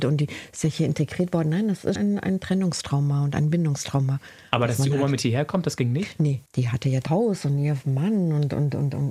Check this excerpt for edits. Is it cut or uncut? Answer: cut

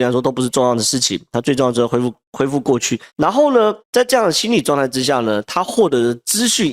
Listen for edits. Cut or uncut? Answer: cut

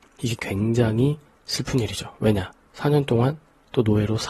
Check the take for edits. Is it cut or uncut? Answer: uncut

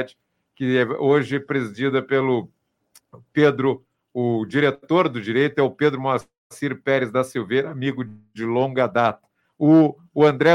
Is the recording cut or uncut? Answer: uncut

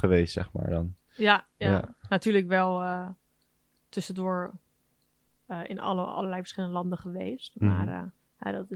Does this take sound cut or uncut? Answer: uncut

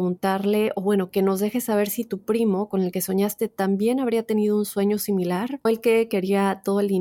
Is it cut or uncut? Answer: cut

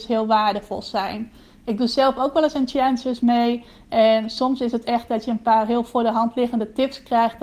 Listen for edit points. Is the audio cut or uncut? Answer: uncut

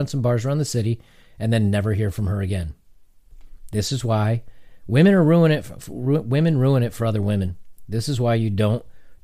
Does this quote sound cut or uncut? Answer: uncut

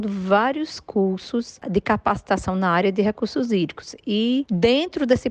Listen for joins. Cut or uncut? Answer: uncut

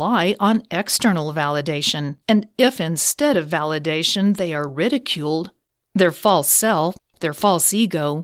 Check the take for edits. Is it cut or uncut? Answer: uncut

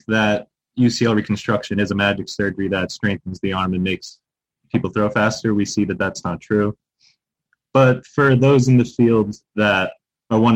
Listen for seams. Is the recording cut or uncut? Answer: uncut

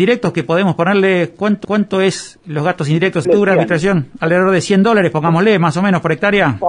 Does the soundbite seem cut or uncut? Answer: cut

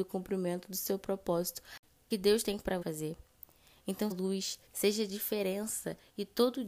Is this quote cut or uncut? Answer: cut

